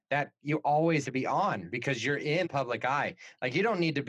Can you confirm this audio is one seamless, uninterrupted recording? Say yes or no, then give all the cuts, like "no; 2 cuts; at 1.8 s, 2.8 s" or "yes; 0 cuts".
no; 2 cuts; at 1.0 s, 2.4 s